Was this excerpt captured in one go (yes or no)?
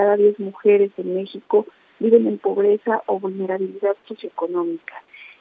yes